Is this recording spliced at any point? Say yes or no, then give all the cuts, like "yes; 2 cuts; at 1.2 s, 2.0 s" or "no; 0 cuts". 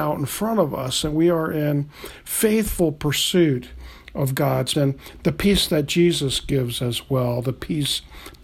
yes; 1 cut; at 4.7 s